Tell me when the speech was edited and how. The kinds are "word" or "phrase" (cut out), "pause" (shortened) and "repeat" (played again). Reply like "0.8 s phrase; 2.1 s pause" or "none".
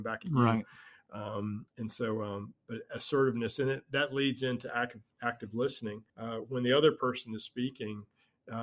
1.7 s pause; 6.1 s pause